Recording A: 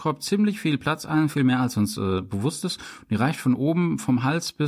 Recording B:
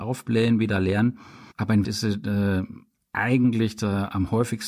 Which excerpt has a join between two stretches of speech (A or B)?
B